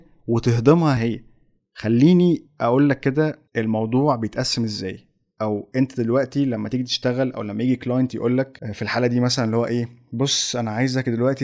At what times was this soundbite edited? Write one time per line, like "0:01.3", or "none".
0:01.0